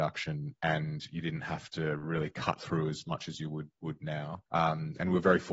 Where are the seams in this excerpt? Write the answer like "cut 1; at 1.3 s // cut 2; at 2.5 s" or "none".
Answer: cut 1; at 4.5 s